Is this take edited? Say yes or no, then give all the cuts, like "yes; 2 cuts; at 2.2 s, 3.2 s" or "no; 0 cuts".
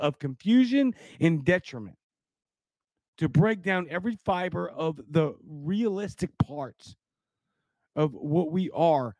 no; 0 cuts